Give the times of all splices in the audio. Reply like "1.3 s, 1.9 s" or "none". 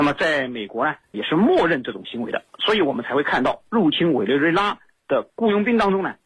1.1 s